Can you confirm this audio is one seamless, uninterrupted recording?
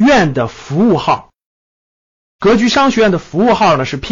yes; 0 cuts

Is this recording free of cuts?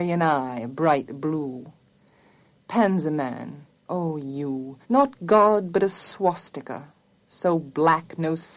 no; 2 cuts; at 3.7 s, 4.8 s

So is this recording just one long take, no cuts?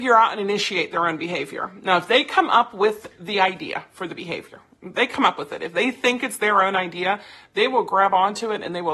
yes; 0 cuts

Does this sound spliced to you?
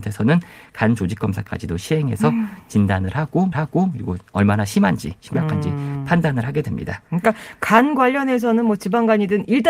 yes; 1 cut; at 3.5 s

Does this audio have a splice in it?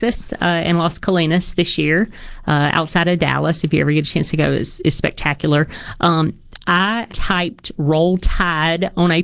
yes; 1 cut; at 7.1 s

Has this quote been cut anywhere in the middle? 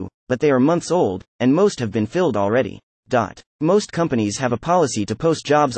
yes; 1 cut; at 2.9 s

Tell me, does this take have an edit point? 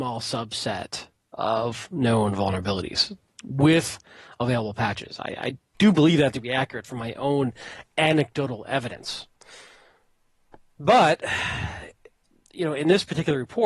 no; 0 cuts

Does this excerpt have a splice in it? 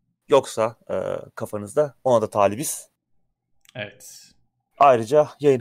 no; 0 cuts

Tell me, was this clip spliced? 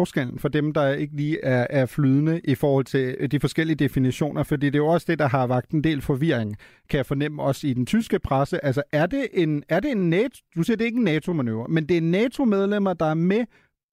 no; 0 cuts

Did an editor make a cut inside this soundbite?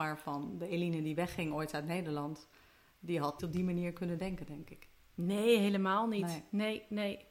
yes; 1 cut; at 3.4 s

